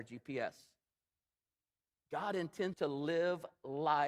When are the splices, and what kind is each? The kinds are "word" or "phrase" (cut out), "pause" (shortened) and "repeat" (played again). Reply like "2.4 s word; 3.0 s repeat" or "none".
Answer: 2.7 s word